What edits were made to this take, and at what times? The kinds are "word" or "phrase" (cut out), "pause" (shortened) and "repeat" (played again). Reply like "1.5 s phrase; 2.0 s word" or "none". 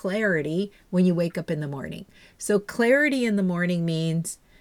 none

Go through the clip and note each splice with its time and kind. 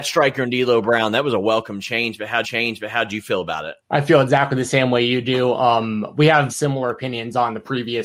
2.4 s repeat; 3.8 s pause; 6.5 s word

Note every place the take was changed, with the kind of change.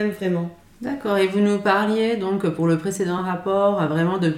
none

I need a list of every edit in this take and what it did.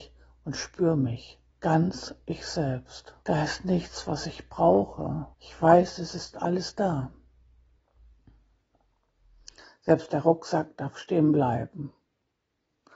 1.5 s pause; 3.2 s pause; 5.3 s pause

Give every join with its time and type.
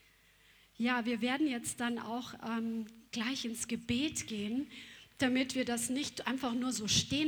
none

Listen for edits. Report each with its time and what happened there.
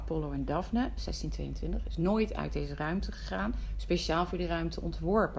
none

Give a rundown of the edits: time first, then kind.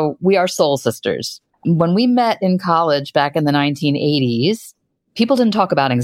none

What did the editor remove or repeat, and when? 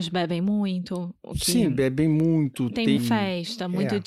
3.0 s word

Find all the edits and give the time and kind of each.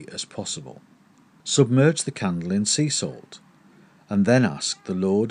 none

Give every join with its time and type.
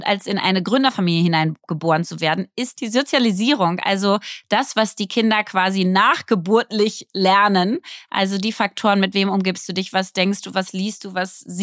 none

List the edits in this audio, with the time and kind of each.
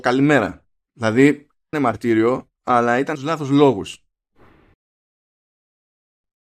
1.7 s phrase; 3.2 s phrase

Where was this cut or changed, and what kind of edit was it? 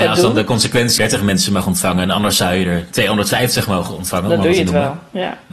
1.0 s phrase

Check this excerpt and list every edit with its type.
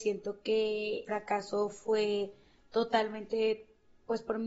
1.1 s word

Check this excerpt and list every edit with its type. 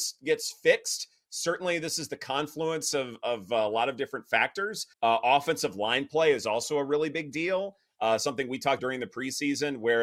4.9 s pause; 8.8 s word

